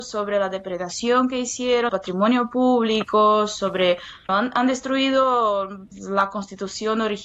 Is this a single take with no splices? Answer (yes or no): no